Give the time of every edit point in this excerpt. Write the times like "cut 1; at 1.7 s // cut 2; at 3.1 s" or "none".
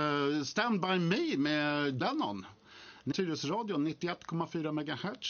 cut 1; at 2.0 s // cut 2; at 3.1 s

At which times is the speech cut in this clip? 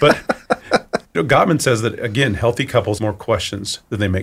cut 1; at 1.1 s // cut 2; at 3.0 s

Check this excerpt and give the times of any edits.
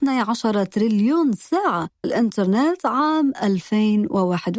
cut 1; at 2.0 s

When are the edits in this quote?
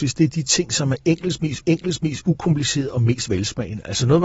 cut 1; at 1.6 s

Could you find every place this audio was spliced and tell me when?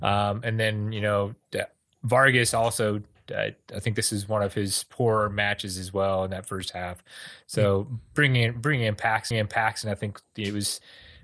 cut 1; at 9.3 s

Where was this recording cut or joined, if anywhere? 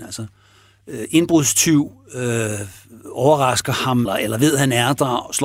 cut 1; at 4.1 s

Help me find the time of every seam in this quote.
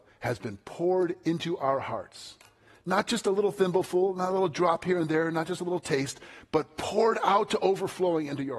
none

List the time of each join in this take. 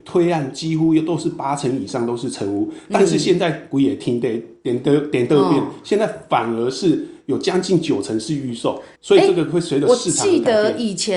cut 1; at 8.9 s

